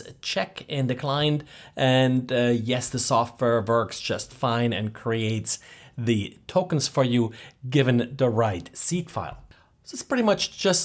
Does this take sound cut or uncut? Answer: uncut